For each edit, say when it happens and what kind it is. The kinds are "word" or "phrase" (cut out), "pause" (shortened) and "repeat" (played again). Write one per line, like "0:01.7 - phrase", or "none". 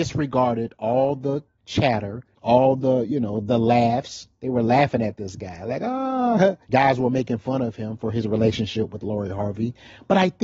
0:02.3 - pause
0:06.6 - pause